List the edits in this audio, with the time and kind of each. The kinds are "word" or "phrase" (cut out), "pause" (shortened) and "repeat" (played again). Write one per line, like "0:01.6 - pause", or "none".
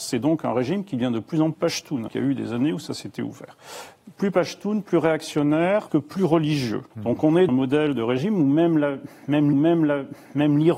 0:01.5 - word
0:02.1 - word
0:05.9 - word
0:06.9 - pause
0:07.5 - word
0:09.5 - repeat